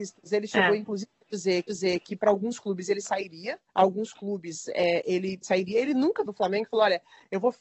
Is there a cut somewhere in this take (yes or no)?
yes